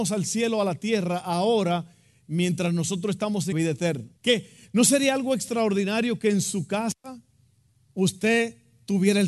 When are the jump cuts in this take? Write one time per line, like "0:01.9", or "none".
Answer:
0:03.5
0:04.2